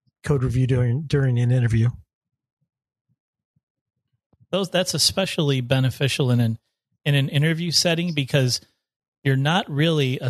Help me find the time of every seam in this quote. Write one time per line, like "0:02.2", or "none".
none